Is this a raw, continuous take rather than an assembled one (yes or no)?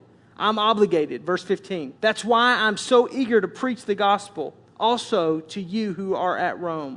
no